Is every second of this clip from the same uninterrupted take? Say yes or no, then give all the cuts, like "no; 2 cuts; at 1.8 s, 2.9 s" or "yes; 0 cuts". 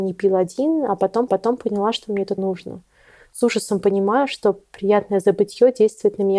no; 2 cuts; at 1.3 s, 2.4 s